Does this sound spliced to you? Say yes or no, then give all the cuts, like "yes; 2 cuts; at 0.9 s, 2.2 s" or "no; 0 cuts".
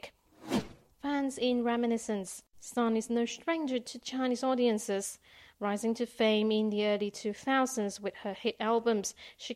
no; 0 cuts